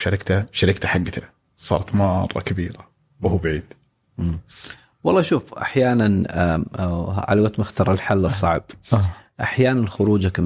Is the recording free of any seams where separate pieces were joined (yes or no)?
yes